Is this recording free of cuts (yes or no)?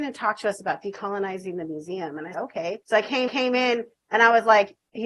no